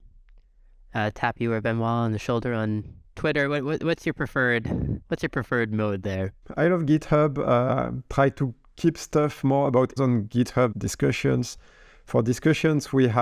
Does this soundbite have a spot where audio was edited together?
yes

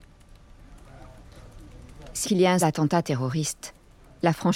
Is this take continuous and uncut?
no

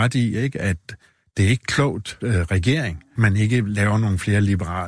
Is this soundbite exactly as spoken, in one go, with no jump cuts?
no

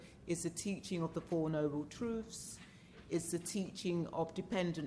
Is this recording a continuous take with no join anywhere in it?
yes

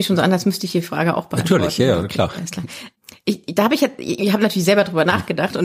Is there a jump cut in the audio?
no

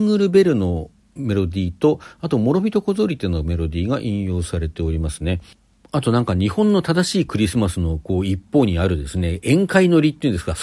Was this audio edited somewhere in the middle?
no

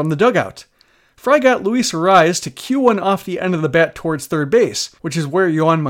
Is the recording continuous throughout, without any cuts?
no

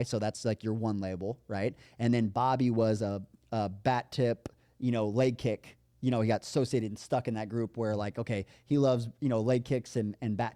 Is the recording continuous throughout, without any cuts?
yes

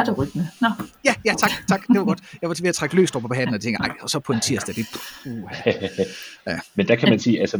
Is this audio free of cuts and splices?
yes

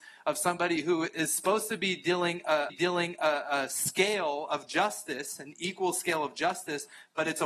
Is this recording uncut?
no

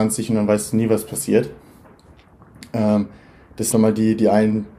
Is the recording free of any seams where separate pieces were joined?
no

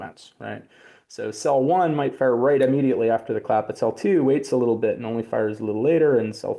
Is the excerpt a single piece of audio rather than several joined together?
yes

